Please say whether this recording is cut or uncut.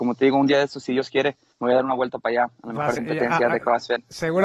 cut